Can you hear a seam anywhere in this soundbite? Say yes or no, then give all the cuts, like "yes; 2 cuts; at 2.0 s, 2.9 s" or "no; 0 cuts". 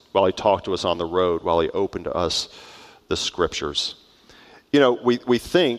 no; 0 cuts